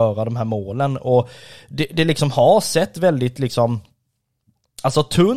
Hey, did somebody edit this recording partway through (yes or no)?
no